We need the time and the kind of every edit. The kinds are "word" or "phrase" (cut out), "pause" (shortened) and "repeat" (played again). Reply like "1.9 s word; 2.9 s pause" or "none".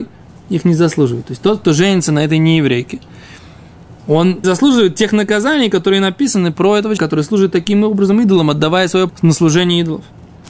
4.4 s word; 7.0 s word; 9.1 s word